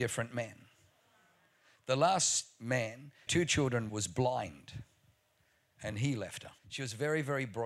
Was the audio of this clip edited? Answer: yes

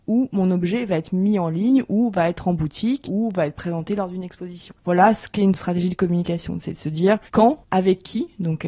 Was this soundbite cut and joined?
yes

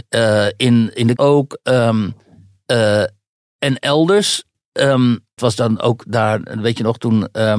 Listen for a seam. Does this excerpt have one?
yes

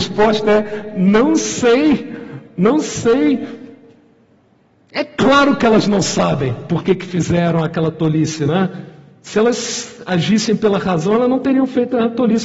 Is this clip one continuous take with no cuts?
yes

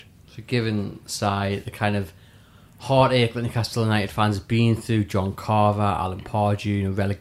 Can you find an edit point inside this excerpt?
no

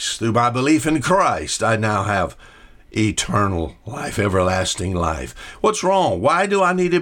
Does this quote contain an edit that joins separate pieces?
no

